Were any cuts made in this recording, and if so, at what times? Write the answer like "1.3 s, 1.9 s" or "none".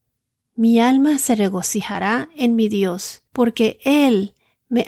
3.3 s